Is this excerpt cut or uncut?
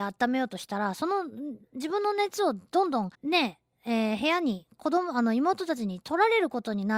cut